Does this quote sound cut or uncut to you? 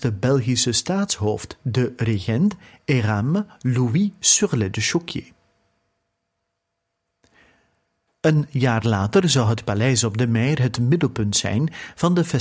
uncut